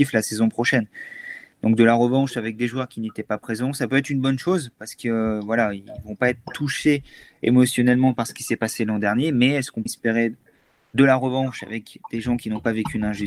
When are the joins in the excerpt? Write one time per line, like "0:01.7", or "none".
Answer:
0:09.9